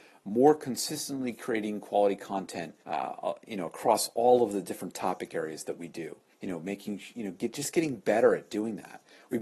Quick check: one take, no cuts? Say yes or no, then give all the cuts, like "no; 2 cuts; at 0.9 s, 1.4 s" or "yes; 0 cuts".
no; 2 cuts; at 2.8 s, 6.3 s